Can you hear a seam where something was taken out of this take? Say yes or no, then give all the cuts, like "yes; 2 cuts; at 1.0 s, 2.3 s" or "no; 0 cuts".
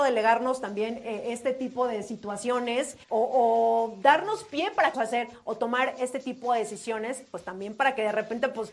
yes; 2 cuts; at 3.0 s, 4.9 s